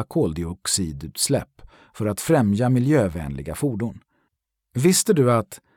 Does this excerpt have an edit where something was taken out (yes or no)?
no